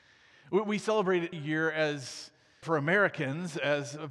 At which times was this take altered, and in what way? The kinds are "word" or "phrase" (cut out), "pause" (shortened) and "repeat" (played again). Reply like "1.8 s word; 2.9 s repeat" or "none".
1.3 s word; 2.6 s word